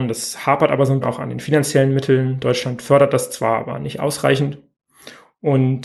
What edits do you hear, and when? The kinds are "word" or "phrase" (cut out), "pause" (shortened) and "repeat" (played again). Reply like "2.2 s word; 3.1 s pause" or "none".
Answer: 1.0 s word

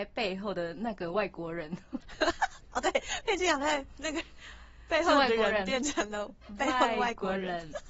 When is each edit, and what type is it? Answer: 2.0 s word

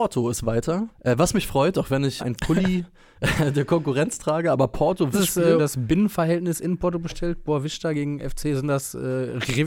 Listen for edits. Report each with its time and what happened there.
0.9 s pause; 2.2 s word; 5.1 s phrase; 5.6 s word

